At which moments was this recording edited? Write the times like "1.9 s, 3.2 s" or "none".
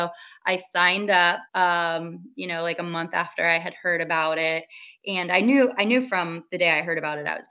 1.5 s